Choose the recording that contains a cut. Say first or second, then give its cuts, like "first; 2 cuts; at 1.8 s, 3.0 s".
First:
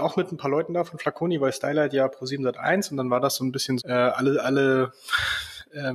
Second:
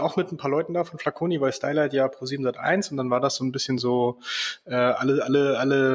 first; 2 cuts; at 3.8 s, 4.4 s